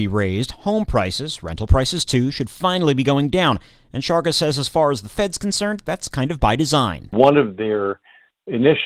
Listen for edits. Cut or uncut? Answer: uncut